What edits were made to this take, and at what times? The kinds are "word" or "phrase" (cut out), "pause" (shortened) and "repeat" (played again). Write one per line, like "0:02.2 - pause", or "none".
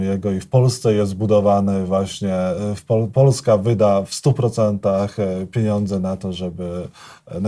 none